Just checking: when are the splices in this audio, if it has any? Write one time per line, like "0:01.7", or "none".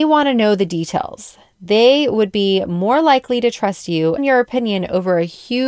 0:04.2